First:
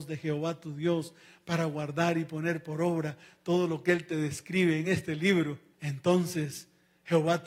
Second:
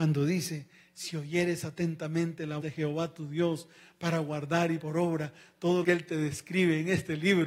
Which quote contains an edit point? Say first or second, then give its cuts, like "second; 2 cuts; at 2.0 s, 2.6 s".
second; 3 cuts; at 2.6 s, 4.8 s, 5.8 s